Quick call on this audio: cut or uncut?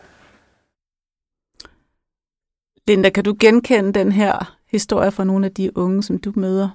uncut